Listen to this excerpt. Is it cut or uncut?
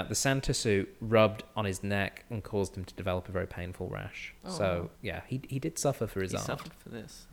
cut